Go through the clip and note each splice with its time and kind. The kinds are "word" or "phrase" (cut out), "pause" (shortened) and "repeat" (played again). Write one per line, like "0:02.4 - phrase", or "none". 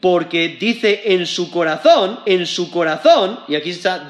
0:02.3 - repeat